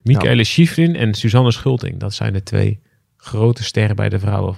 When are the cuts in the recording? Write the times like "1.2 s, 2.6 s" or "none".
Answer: none